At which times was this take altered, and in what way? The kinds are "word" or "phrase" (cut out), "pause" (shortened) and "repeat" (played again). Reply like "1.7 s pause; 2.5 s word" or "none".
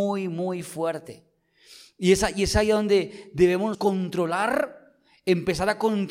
3.7 s word